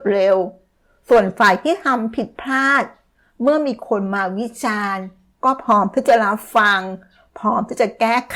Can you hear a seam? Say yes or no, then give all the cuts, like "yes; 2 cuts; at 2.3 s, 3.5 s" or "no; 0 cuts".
no; 0 cuts